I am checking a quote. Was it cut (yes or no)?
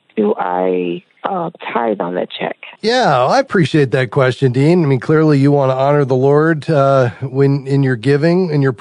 yes